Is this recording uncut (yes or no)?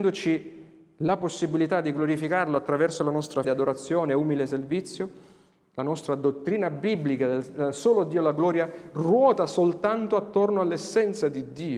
no